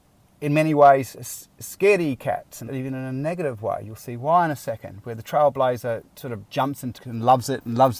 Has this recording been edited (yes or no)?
yes